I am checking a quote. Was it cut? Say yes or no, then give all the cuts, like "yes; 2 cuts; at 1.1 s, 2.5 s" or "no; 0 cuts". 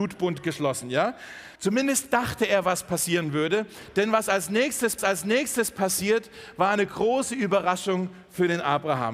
yes; 2 cuts; at 1.6 s, 5.0 s